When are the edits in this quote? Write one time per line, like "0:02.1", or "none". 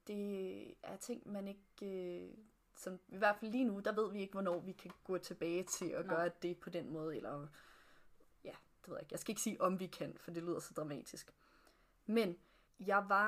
none